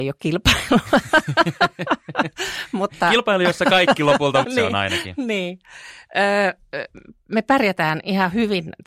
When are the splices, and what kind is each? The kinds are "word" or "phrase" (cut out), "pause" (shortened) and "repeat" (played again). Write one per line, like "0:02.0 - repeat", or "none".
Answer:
0:04.4 - word